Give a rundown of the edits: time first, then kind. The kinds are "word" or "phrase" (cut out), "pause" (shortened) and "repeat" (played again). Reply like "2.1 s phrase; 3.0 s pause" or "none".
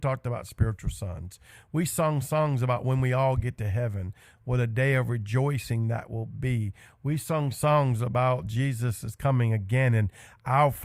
none